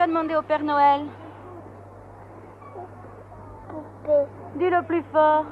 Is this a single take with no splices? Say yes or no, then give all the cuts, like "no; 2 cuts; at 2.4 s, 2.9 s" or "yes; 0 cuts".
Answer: no; 1 cut; at 3.6 s